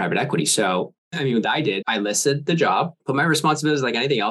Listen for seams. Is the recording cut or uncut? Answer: cut